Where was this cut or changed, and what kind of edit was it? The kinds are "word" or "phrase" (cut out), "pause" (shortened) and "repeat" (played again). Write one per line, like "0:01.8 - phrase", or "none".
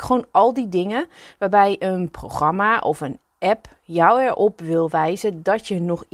none